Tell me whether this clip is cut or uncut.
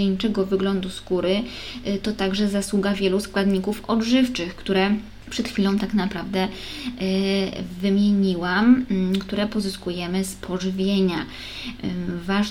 uncut